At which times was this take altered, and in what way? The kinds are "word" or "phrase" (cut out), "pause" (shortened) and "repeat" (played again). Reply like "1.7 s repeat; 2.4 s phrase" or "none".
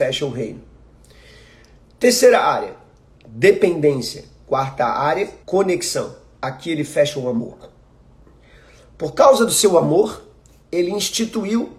5.4 s pause